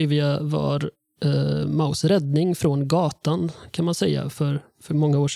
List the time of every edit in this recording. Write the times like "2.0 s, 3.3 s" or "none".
none